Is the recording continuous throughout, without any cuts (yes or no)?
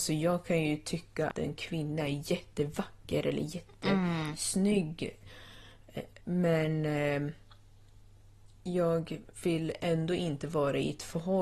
no